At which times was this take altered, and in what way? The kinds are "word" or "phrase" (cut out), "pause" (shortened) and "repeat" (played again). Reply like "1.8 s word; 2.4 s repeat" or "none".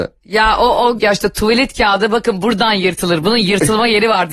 1.0 s phrase

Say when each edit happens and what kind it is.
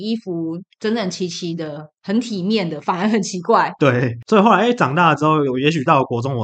none

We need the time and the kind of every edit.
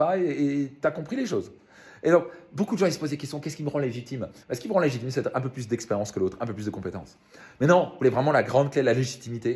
4.4 s pause

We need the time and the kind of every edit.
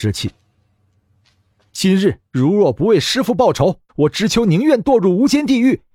2.3 s pause; 3.9 s pause

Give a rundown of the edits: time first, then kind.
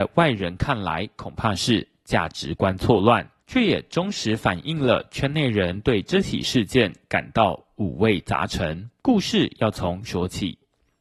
3.4 s pause; 9.0 s pause; 10.0 s word

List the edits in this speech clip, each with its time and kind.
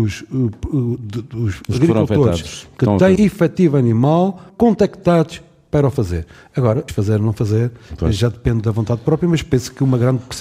3.2 s word; 4.5 s word; 6.9 s word

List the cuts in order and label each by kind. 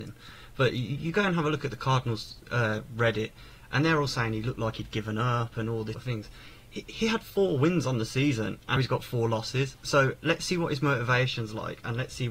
5.9 s word; 8.8 s word

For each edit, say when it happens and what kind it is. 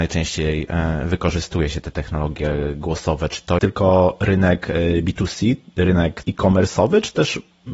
3.6 s word; 6.2 s word

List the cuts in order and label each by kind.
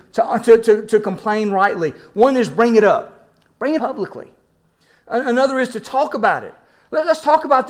3.8 s word

